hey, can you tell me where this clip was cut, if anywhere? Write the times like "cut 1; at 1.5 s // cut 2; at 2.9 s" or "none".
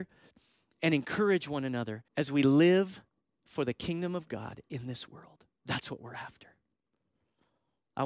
cut 1; at 2.1 s // cut 2; at 3.3 s // cut 3; at 5.5 s